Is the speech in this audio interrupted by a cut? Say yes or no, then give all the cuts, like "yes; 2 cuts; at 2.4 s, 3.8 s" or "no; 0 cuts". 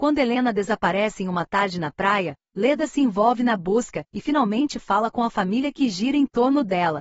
yes; 1 cut; at 4.1 s